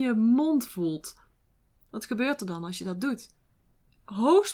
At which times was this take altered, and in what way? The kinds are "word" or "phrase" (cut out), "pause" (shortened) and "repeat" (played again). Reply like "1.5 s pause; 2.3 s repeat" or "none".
none